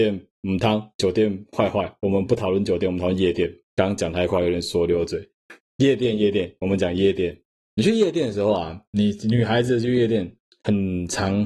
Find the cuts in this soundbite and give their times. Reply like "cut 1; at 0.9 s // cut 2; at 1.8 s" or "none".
cut 1; at 3.6 s // cut 2; at 7.6 s